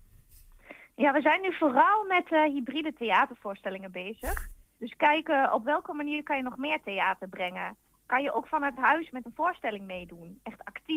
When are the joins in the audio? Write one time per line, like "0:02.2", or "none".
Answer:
none